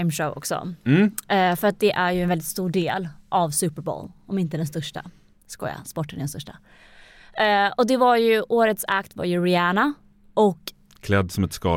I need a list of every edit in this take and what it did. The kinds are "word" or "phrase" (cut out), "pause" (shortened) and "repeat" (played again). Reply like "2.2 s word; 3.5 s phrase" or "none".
none